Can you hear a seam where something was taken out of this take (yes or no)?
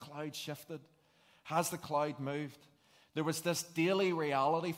no